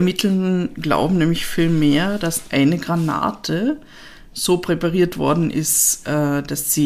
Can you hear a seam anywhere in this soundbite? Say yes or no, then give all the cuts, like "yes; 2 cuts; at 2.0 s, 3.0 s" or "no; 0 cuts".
no; 0 cuts